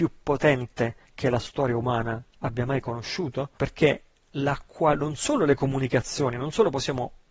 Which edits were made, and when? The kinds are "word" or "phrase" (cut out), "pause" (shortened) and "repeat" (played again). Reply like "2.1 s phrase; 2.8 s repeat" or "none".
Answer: 1.0 s pause; 3.6 s pause